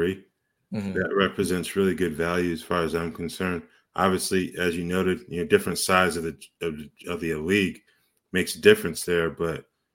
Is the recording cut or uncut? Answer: uncut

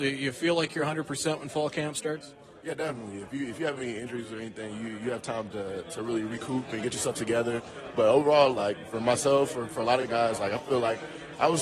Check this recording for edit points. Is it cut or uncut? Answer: uncut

